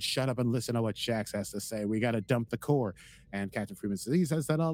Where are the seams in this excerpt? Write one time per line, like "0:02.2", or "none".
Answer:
none